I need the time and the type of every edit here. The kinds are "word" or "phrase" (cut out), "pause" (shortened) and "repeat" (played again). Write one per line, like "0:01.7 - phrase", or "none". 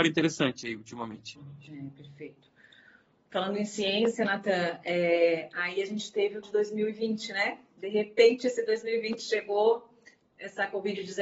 0:06.4 - word

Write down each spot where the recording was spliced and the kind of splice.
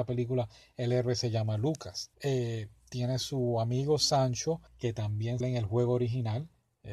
0:02.1 - pause
0:04.7 - pause
0:05.4 - word

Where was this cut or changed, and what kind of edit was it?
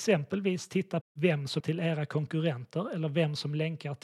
0:01.0 - word
0:01.6 - word

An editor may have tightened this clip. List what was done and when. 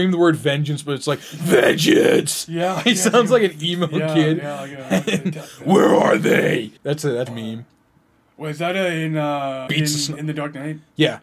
0:06.8 - pause
0:07.3 - phrase
0:09.7 - phrase

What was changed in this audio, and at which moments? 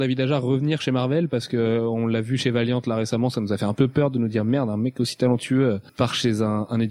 0:05.9 - pause

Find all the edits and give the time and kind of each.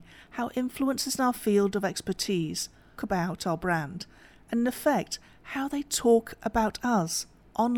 0:03.0 - word

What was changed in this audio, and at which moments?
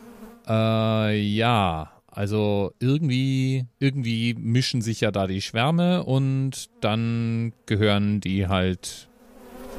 0:03.8 - pause

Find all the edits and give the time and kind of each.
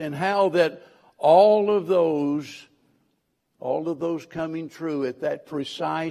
none

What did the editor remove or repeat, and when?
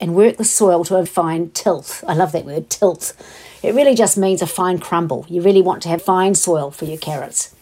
0:01.1 - word
0:06.0 - word

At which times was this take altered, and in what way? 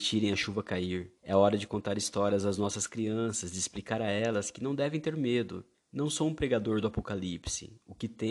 0:01.2 - pause
0:05.7 - pause

